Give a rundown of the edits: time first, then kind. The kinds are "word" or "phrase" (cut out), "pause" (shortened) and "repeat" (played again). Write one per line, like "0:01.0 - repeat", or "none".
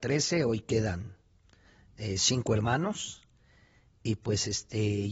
none